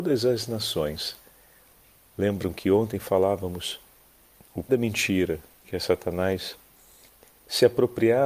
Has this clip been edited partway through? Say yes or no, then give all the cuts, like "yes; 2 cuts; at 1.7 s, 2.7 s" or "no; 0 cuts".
yes; 2 cuts; at 4.4 s, 4.7 s